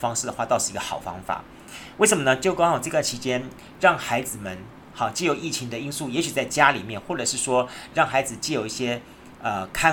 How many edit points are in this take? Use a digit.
1